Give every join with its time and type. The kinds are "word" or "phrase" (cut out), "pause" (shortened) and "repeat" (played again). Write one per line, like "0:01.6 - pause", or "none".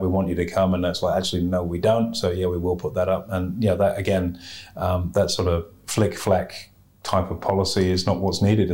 none